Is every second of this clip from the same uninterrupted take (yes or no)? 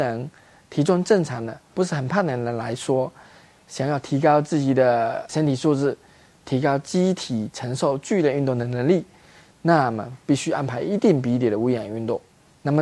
yes